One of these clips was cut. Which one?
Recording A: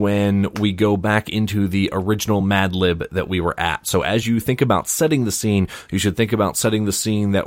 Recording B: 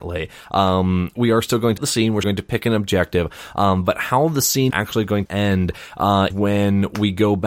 B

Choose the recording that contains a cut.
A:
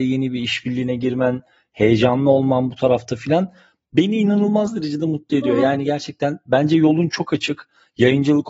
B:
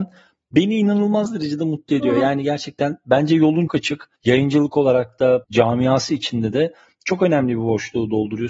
B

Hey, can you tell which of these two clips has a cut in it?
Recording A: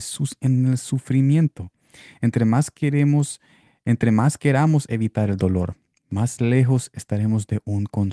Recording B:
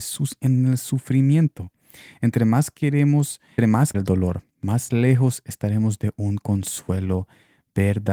B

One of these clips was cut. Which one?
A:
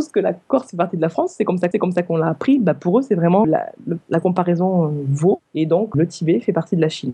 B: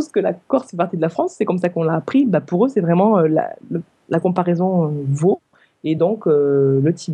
A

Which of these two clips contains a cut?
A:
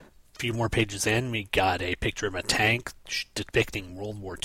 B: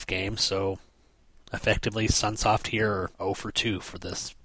B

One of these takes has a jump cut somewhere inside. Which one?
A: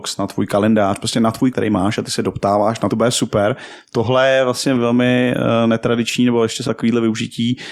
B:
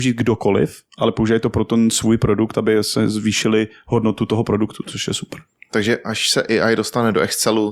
A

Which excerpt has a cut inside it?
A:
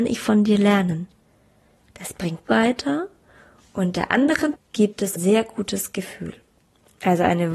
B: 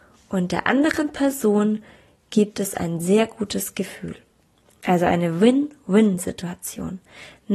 A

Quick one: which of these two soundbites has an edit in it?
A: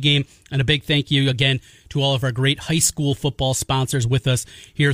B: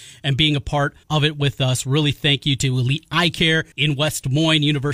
B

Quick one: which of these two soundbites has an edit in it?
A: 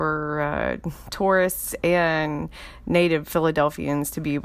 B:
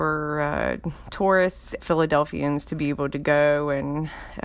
B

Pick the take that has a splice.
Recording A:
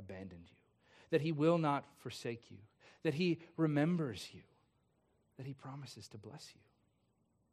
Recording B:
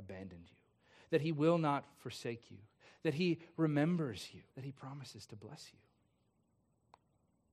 B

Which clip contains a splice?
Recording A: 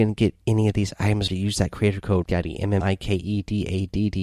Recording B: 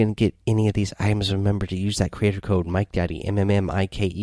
A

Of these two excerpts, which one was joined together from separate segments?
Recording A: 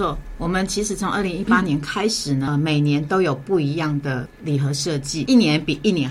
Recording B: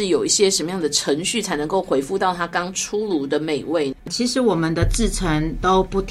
B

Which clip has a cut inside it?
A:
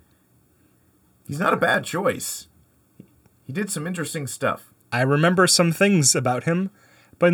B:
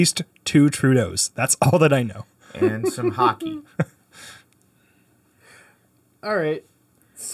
A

